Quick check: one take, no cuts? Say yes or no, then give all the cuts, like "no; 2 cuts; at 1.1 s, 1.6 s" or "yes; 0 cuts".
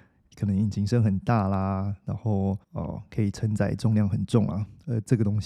no; 1 cut; at 2.6 s